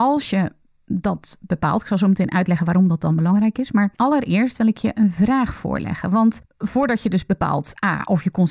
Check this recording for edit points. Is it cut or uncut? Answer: uncut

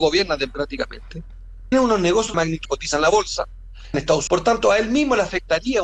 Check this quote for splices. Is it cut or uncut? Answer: cut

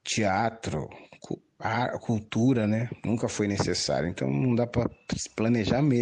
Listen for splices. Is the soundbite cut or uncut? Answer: uncut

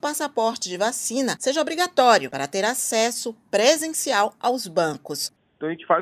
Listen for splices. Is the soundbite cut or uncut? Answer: uncut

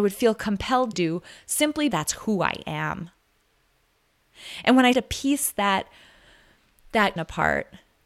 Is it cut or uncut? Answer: cut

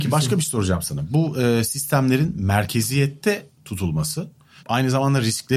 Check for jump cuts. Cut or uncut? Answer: uncut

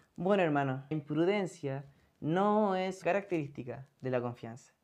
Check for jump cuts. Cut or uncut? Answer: cut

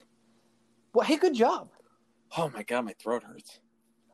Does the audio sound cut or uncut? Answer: uncut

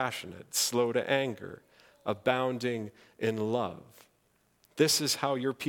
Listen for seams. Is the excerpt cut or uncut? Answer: uncut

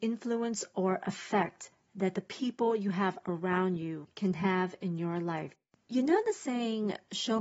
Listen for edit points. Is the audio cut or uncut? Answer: uncut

